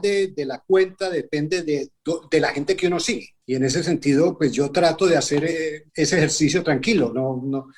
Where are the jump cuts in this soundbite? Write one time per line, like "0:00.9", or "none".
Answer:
0:03.4
0:05.9